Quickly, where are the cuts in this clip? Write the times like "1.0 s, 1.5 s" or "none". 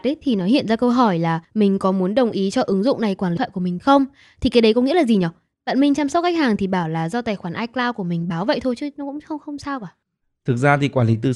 1.4 s, 3.4 s